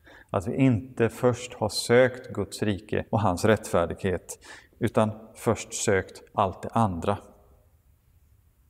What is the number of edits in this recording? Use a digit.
2